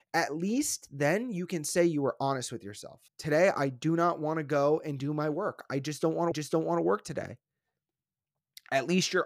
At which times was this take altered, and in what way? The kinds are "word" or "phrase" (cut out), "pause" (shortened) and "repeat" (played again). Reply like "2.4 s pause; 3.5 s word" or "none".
3.1 s pause; 6.3 s repeat